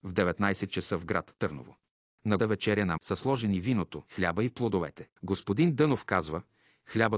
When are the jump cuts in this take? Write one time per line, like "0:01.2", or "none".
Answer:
0:02.4
0:03.0
0:04.1
0:05.1